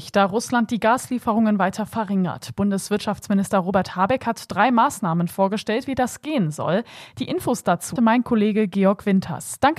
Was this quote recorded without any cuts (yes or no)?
no